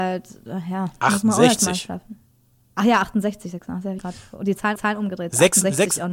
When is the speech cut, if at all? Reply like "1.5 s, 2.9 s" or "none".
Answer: 4.0 s, 4.8 s